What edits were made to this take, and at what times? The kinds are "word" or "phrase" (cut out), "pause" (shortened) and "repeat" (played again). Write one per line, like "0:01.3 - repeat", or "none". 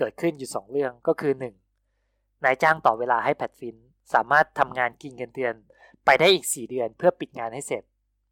none